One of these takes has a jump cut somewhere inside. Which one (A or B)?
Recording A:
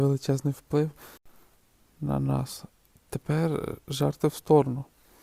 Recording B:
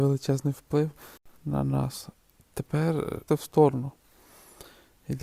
B